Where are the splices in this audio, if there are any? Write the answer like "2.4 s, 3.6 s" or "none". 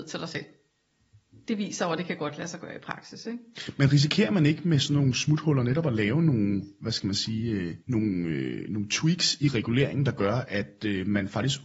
7.8 s